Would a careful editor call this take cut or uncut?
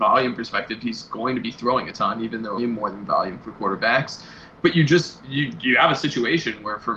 cut